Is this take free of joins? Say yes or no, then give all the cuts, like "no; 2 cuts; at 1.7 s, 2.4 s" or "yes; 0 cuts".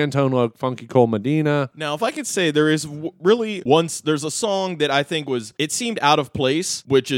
yes; 0 cuts